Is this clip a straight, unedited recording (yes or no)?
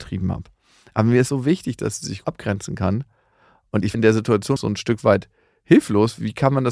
no